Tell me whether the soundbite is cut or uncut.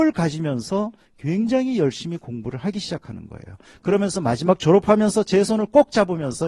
uncut